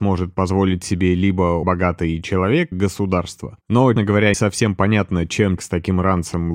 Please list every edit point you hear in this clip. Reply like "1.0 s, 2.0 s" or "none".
1.6 s, 2.7 s, 4.0 s, 4.3 s, 5.6 s